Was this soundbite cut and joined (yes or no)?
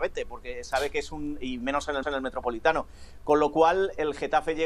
yes